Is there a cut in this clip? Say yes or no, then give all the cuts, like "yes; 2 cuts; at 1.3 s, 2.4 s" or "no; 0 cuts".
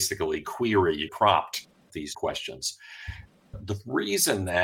yes; 2 cuts; at 1.1 s, 2.1 s